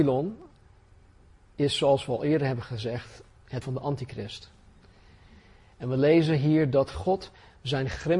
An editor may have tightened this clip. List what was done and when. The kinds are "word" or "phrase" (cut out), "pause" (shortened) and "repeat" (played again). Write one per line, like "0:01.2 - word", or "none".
0:03.6 - word